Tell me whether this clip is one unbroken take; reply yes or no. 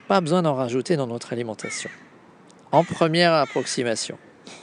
yes